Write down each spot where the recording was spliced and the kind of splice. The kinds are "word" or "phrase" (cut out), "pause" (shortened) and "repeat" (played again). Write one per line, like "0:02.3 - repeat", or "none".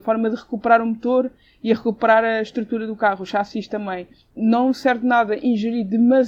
0:04.2 - pause